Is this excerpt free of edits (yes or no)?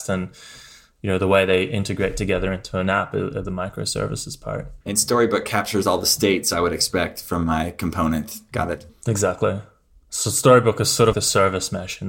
no